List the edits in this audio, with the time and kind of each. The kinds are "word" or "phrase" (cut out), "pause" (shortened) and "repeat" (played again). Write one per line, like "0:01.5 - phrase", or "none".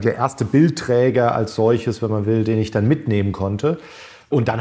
none

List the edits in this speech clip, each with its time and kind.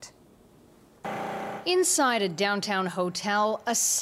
none

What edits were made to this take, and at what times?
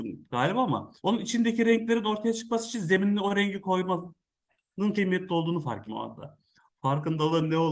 0:01.0 - pause
0:04.9 - word
0:05.9 - word
0:06.5 - pause

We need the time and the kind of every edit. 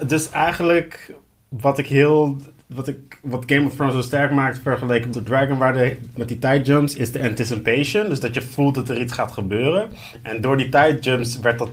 0:05.1 - word

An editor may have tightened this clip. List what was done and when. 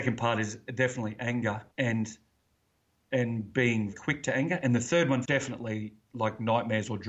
0:01.7 - pause
0:03.9 - word
0:05.2 - phrase

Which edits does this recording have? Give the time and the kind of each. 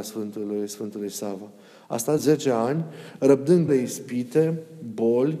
0:02.2 - word
0:03.7 - word

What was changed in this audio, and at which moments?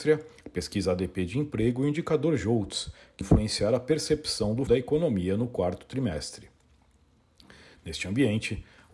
0:03.2 - word
0:04.7 - word

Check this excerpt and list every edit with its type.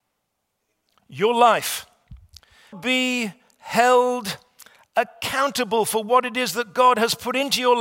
0:02.7 - word

